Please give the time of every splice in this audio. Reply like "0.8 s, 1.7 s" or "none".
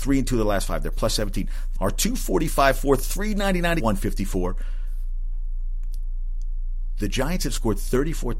1.8 s, 3.8 s